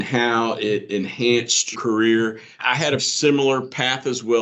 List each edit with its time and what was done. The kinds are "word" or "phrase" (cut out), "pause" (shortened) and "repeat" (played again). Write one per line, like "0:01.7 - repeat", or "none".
0:01.7 - word
0:03.0 - word